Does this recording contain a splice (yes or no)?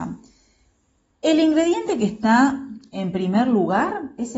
no